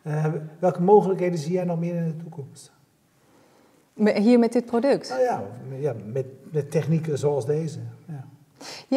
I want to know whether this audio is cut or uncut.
uncut